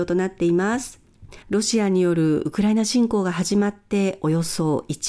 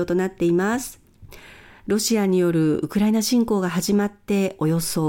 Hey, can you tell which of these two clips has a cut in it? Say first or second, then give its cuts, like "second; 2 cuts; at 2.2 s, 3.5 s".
first; 1 cut; at 1.4 s